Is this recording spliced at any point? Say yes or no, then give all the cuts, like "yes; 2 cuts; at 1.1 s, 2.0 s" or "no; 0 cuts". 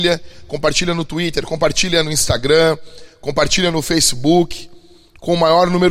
no; 0 cuts